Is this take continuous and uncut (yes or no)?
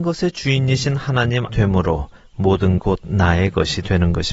no